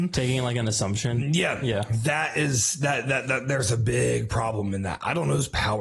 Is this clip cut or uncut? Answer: uncut